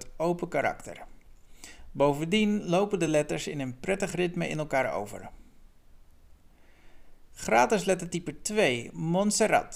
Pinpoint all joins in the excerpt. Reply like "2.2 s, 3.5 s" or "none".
none